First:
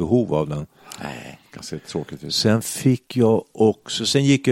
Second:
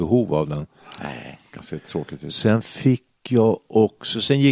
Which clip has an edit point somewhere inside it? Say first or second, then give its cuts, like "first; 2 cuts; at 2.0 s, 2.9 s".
first; 1 cut; at 3.1 s